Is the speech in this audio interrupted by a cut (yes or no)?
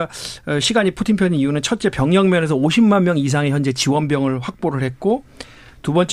no